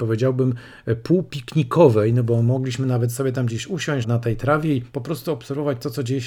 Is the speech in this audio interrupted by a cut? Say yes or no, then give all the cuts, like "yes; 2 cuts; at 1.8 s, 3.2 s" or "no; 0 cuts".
yes; 1 cut; at 4.0 s